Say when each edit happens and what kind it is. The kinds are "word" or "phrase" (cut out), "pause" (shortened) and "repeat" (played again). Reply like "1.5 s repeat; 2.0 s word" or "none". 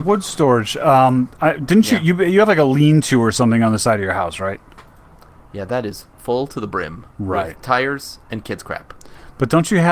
1.3 s pause; 6.1 s pause